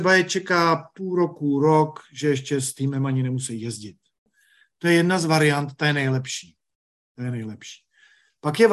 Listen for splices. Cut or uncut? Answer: cut